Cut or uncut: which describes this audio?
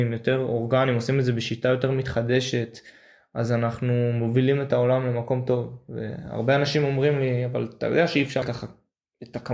cut